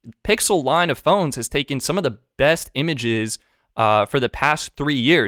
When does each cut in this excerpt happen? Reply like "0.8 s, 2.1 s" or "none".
none